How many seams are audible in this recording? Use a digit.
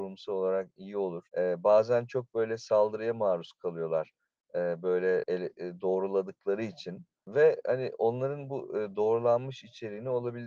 1